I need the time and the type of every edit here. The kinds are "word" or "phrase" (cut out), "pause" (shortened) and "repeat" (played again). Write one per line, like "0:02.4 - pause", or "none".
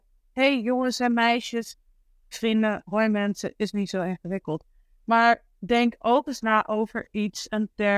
0:02.3 - word